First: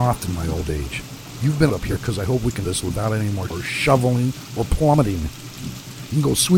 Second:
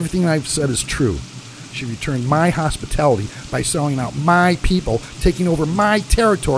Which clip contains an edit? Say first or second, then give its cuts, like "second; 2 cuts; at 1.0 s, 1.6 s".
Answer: first; 3 cuts; at 1.7 s, 2.6 s, 3.5 s